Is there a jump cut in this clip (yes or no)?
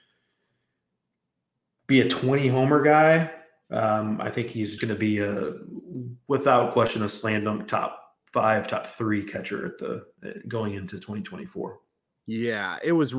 yes